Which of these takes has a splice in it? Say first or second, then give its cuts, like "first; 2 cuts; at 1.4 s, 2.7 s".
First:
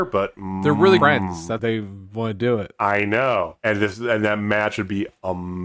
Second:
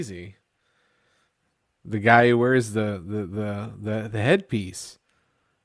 first; 3 cuts; at 1.0 s, 1.6 s, 3.6 s